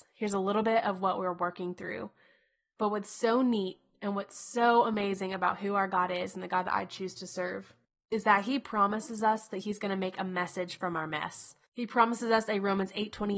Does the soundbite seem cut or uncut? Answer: uncut